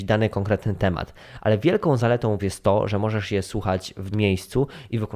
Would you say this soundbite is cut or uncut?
cut